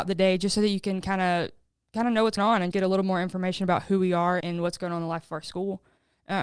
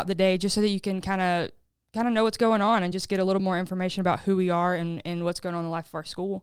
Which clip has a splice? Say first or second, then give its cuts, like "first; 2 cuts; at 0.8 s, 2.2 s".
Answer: first; 3 cuts; at 2.4 s, 2.7 s, 4.4 s